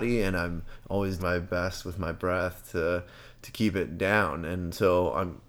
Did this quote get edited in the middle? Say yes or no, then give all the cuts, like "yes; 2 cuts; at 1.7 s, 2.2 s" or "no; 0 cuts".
yes; 1 cut; at 1.2 s